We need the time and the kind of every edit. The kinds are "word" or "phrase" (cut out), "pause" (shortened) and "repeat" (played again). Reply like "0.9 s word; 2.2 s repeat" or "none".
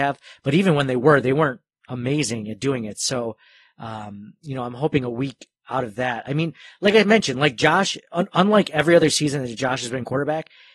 none